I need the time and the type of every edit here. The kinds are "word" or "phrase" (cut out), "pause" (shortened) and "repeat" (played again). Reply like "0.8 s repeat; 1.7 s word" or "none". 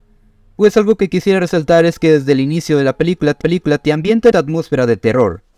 3.4 s repeat; 4.3 s word